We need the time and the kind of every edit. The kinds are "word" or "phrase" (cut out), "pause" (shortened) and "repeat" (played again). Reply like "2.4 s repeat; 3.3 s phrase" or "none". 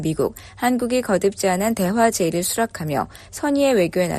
none